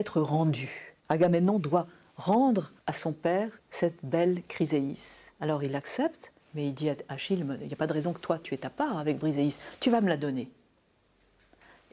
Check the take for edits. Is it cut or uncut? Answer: cut